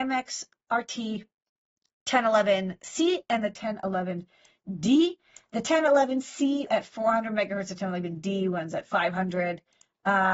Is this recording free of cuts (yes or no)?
no